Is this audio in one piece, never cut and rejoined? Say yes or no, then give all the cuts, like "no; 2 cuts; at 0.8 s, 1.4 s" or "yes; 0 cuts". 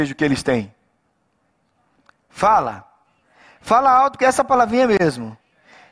yes; 0 cuts